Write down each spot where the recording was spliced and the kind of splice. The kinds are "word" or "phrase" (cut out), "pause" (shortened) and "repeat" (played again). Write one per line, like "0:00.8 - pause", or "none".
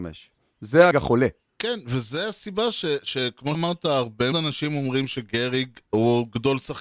0:00.9 - word
0:03.5 - word
0:04.3 - word